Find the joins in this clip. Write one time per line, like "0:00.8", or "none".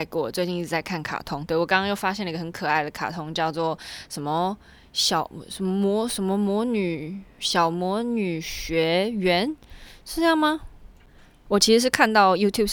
none